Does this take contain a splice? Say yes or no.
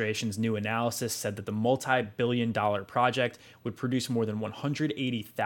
no